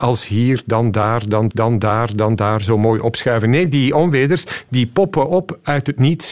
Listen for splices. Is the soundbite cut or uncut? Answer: cut